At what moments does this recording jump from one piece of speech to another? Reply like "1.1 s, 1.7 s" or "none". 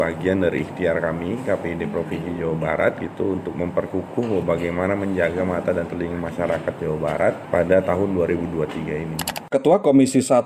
none